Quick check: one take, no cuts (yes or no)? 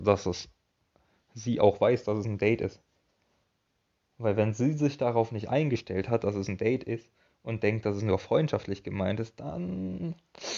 yes